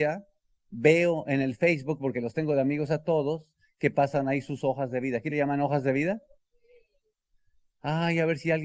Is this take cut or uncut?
uncut